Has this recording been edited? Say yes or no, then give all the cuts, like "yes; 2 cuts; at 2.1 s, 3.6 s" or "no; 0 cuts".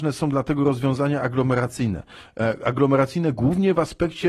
no; 0 cuts